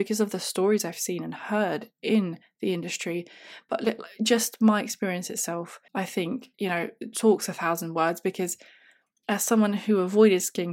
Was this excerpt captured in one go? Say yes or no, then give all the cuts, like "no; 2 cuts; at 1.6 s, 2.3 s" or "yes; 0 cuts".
no; 2 cuts; at 5.9 s, 6.5 s